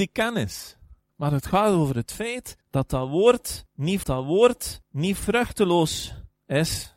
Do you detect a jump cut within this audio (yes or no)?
yes